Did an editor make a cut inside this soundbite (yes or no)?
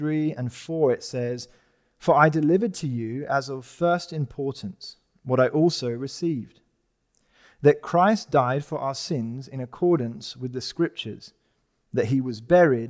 no